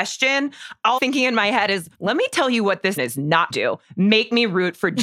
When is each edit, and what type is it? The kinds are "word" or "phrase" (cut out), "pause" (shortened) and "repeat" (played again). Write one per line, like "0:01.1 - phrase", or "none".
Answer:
0:01.0 - phrase
0:01.9 - pause
0:03.0 - word
0:03.5 - phrase